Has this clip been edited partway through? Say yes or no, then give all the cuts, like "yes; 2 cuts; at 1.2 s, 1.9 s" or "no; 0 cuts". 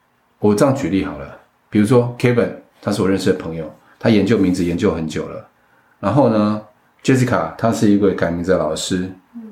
no; 0 cuts